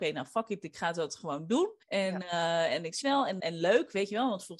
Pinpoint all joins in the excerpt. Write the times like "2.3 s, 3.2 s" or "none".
1.8 s, 3.0 s, 3.4 s

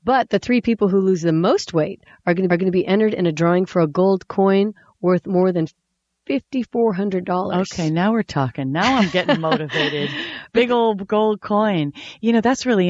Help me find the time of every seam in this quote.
2.5 s

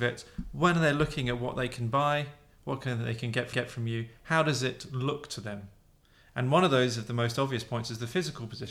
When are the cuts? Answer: 3.5 s

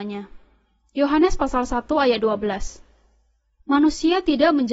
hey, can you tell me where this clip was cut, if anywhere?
none

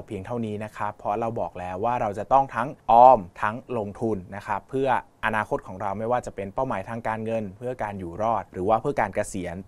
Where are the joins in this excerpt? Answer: 2.8 s, 3.3 s, 8.5 s

